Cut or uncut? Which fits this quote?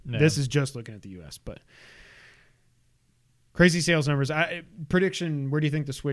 uncut